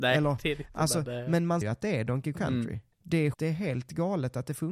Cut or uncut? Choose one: cut